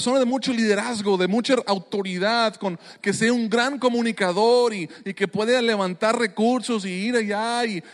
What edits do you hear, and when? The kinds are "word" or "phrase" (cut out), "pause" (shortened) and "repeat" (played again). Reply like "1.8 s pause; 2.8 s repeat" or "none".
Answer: none